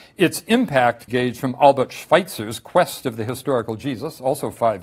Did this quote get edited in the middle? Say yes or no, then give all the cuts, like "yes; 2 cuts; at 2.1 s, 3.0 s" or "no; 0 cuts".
yes; 1 cut; at 1.1 s